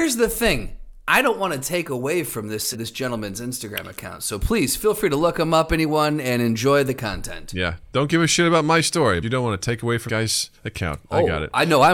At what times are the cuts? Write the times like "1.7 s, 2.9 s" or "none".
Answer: 2.7 s, 9.2 s, 10.1 s